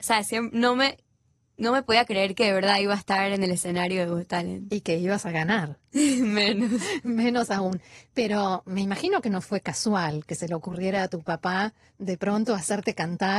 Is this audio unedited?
yes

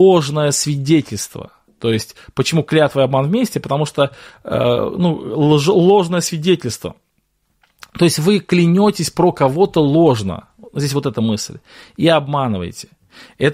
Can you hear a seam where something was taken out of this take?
no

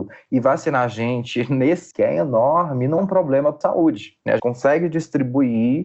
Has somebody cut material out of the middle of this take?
yes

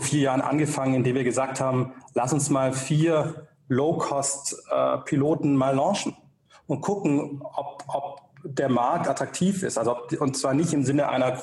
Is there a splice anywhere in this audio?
no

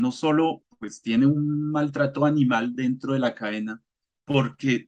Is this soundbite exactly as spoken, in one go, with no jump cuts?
yes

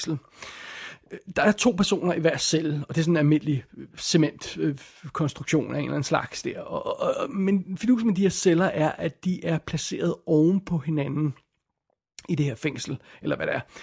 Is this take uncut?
no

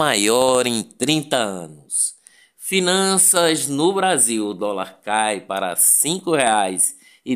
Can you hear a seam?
no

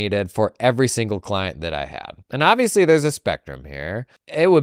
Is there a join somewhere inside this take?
yes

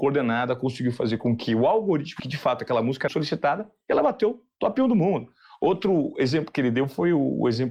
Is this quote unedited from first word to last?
no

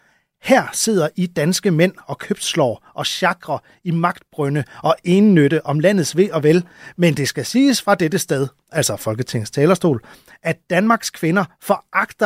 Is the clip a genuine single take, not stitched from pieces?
yes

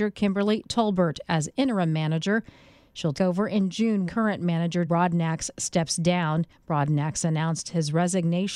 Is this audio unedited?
no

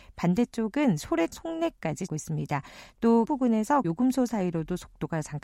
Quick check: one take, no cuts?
no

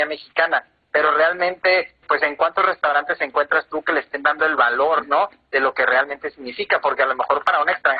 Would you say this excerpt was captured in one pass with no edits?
yes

